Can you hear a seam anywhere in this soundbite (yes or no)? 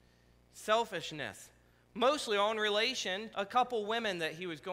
yes